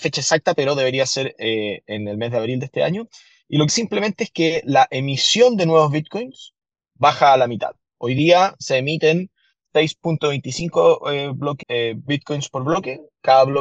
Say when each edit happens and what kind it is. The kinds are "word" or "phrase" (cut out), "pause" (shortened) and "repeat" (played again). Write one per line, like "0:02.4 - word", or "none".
0:03.7 - word
0:11.6 - word

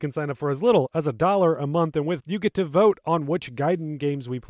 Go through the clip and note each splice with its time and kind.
0:02.2 - word

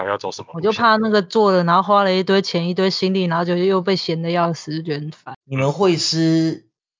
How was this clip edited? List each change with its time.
0:05.4 - pause

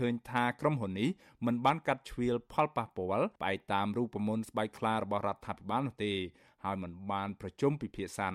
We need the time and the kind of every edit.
0:03.4 - pause

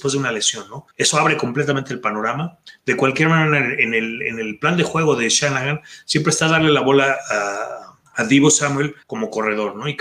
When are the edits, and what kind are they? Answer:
0:00.9 - pause
0:08.1 - pause
0:09.0 - pause

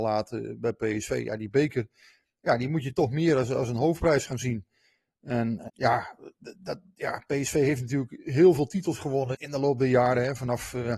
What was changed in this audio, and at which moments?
0:05.7 - word
0:09.3 - word

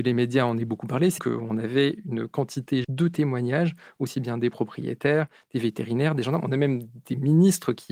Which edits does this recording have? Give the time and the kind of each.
0:01.2 - word
0:02.8 - word

